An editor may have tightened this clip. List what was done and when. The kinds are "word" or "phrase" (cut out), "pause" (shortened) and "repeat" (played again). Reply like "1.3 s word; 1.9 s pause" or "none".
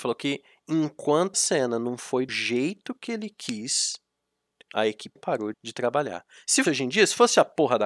1.3 s word; 2.3 s word; 4.7 s word; 5.2 s word; 5.5 s word; 6.6 s word

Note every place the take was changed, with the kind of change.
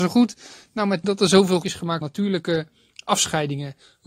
1.0 s word; 1.6 s word; 2.0 s word

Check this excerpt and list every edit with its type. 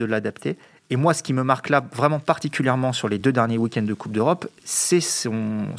none

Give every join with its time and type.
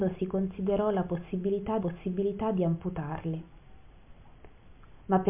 1.8 s repeat

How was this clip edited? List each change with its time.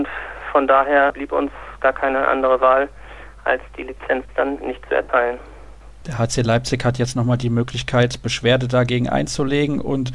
none

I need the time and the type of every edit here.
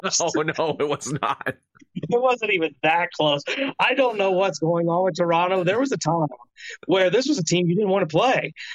none

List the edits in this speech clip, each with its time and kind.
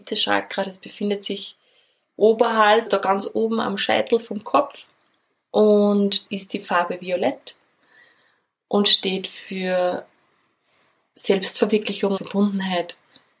2.9 s word; 6.3 s word; 12.2 s word

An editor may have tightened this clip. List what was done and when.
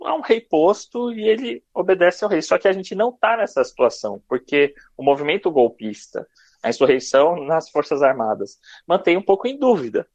none

